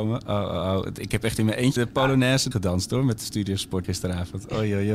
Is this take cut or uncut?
cut